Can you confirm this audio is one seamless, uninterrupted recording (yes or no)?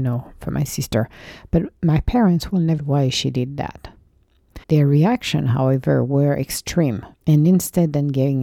no